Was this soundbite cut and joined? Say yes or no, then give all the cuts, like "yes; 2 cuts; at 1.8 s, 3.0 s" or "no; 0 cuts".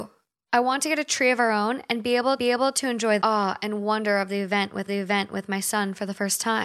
yes; 3 cuts; at 2.4 s, 3.2 s, 4.9 s